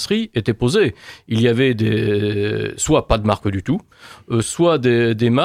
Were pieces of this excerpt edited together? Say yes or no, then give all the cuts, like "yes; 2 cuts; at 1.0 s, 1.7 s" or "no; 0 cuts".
no; 0 cuts